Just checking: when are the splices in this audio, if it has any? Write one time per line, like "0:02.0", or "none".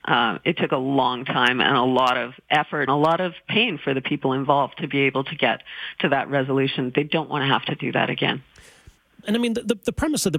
0:02.9
0:09.2